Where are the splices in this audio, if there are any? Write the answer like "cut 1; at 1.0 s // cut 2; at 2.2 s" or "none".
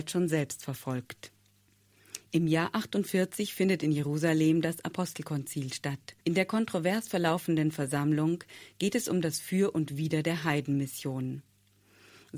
cut 1; at 6.2 s